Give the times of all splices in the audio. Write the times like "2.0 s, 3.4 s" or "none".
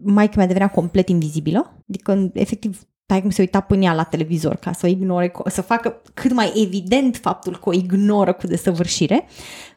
1.8 s